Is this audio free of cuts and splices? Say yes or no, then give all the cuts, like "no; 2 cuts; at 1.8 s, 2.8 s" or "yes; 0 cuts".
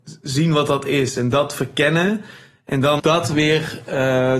no; 1 cut; at 3.0 s